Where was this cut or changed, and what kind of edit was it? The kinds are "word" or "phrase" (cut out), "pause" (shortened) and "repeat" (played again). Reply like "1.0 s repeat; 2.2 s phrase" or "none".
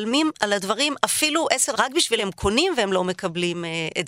1.7 s word; 2.2 s word